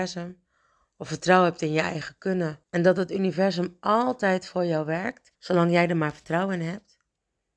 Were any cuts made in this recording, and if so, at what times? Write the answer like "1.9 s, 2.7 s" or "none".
2.6 s, 5.3 s